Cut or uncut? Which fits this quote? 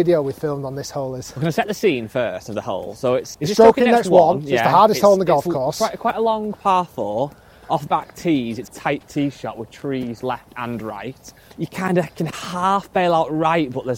cut